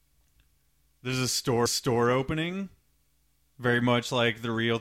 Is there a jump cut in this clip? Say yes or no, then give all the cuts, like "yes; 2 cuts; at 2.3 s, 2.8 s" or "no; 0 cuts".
yes; 1 cut; at 1.7 s